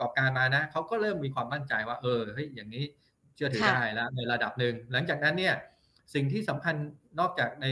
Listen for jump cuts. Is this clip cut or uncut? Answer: uncut